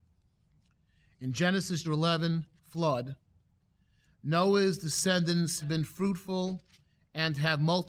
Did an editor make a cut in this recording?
yes; 3 cuts; at 1.8 s, 2.6 s, 5.6 s

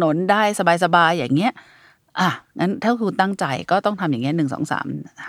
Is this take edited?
no; 0 cuts

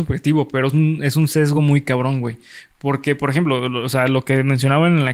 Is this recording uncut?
yes; 0 cuts

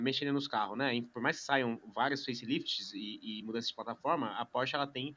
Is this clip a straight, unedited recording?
yes; 0 cuts

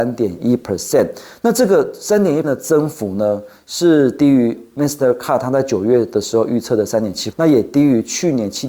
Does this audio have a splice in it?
yes; 2 cuts; at 2.4 s, 7.3 s

